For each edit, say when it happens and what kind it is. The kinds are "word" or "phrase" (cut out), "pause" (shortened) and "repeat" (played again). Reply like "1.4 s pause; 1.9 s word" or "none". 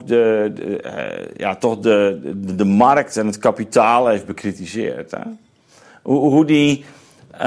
none